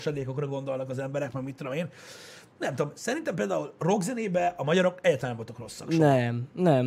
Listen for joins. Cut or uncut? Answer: uncut